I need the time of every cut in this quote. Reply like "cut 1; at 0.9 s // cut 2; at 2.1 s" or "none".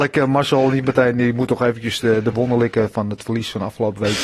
none